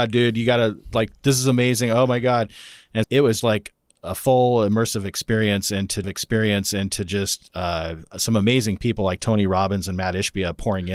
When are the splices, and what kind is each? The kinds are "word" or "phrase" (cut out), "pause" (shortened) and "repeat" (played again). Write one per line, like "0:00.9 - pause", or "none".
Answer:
0:03.0 - word
0:03.4 - word
0:06.0 - repeat